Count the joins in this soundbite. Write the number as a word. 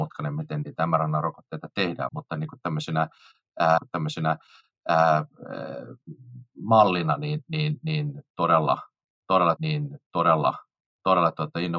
four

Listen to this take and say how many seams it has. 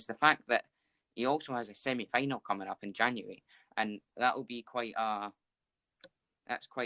one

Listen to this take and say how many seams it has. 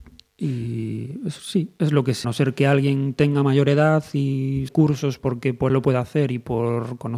four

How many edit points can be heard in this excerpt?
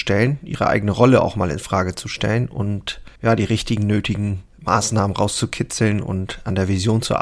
two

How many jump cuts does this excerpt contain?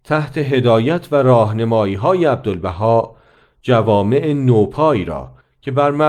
zero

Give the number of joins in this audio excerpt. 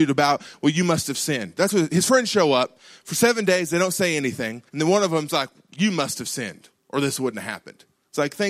one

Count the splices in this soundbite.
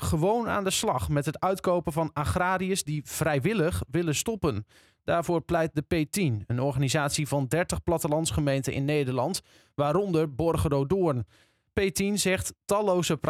zero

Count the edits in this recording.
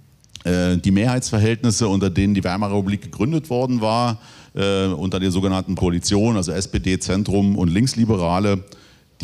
one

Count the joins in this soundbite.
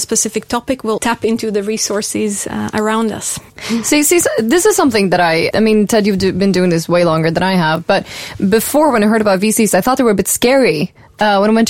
three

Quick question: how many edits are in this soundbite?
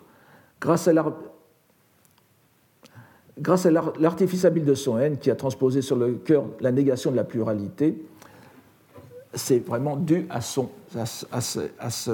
zero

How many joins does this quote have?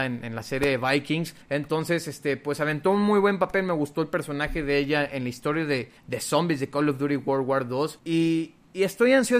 three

